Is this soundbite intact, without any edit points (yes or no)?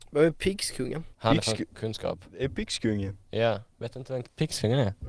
no